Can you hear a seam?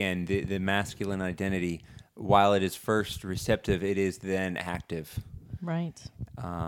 no; 0 cuts

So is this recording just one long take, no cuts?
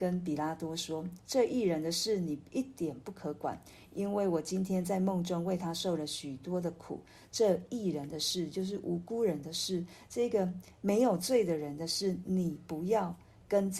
yes; 0 cuts

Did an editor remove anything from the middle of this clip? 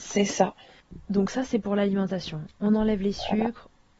no; 0 cuts

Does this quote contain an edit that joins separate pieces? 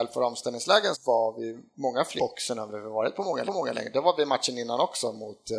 yes; 3 cuts; at 0.9 s, 2.2 s, 3.5 s

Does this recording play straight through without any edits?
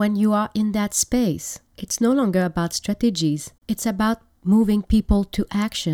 no; 2 cuts; at 1.7 s, 3.6 s

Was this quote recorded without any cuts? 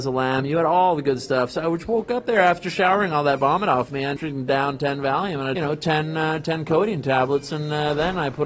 no; 2 cuts; at 4.2 s, 5.6 s

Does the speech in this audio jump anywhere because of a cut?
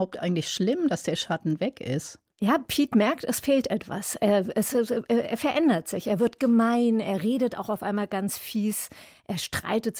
yes; 1 cut; at 2.3 s

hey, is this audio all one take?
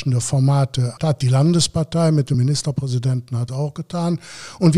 no; 3 cuts; at 1.0 s, 2.3 s, 3.5 s

